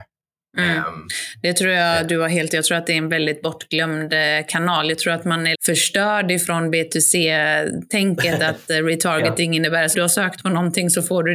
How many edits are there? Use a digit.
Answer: 3